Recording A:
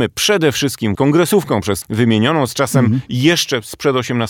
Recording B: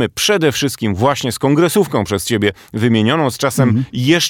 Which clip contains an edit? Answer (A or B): A